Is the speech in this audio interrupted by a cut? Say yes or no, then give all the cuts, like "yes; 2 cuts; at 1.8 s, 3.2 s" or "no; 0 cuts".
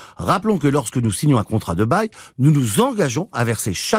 no; 0 cuts